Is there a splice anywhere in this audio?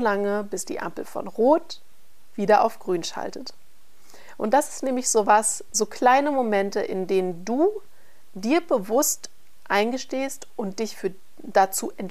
no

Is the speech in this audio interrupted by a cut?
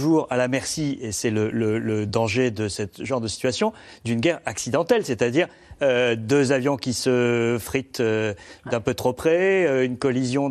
no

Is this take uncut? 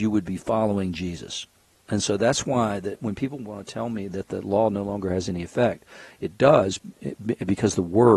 yes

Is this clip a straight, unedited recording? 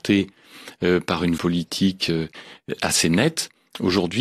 no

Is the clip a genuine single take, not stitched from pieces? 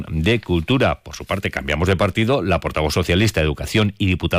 yes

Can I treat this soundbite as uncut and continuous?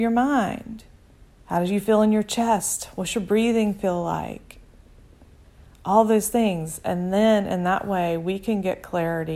no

